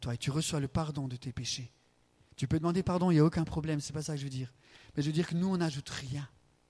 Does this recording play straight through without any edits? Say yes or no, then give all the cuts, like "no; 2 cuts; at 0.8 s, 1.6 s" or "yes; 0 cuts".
yes; 0 cuts